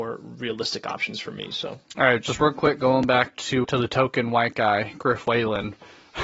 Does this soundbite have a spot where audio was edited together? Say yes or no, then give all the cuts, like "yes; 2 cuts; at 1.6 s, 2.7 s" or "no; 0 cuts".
yes; 1 cut; at 3.6 s